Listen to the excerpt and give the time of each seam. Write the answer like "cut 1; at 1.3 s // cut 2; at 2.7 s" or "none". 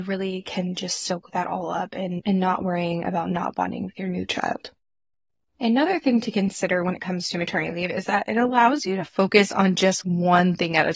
none